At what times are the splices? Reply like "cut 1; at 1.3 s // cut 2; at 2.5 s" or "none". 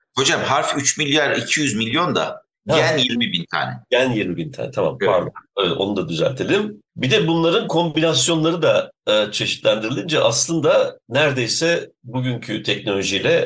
cut 1; at 6.9 s